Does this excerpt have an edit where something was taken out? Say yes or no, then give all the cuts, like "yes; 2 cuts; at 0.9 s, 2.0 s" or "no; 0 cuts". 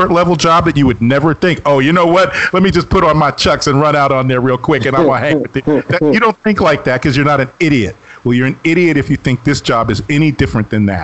no; 0 cuts